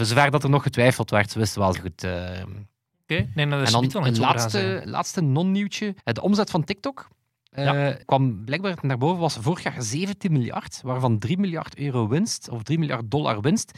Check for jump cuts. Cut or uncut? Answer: cut